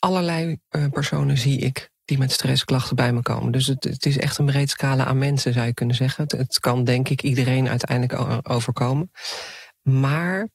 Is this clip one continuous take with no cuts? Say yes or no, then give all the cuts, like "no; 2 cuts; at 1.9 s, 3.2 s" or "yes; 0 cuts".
yes; 0 cuts